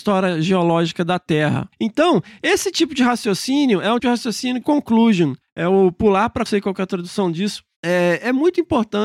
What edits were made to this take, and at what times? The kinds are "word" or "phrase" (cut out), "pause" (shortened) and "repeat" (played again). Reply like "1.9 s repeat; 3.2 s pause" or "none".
4.0 s word; 4.6 s phrase; 6.5 s phrase